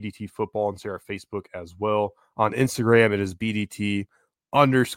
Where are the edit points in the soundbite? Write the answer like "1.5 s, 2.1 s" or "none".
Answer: none